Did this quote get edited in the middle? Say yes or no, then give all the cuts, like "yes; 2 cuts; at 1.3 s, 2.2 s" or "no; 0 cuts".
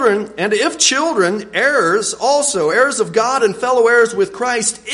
no; 0 cuts